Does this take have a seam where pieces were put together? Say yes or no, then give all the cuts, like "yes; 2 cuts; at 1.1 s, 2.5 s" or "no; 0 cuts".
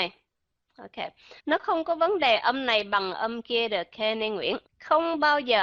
yes; 2 cuts; at 1.4 s, 4.6 s